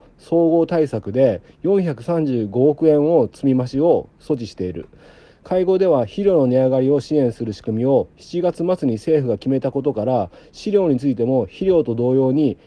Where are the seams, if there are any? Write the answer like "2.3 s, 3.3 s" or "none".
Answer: none